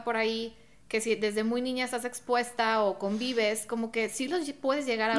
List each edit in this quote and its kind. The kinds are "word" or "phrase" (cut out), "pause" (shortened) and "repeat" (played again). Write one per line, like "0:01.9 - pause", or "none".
none